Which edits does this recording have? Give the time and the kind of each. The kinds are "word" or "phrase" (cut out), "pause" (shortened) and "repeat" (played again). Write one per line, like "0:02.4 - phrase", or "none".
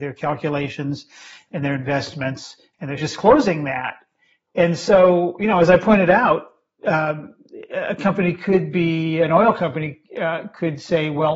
0:03.0 - phrase

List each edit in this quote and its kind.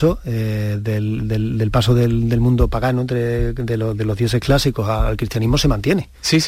none

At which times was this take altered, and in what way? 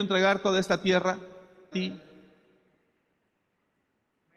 0:01.7 - phrase

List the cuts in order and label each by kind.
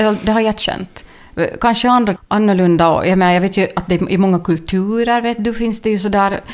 0:02.2 - word

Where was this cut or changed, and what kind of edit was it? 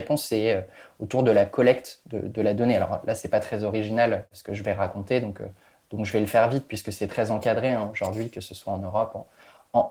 none

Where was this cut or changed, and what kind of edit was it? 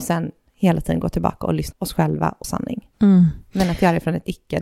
0:01.7 - word
0:02.4 - word
0:02.9 - pause

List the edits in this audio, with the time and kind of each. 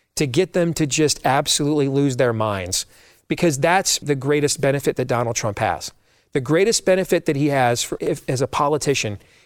0:04.0 - word
0:08.0 - word

